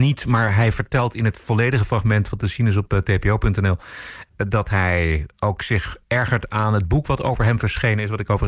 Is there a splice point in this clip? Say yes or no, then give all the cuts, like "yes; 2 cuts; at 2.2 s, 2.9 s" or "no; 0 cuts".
no; 0 cuts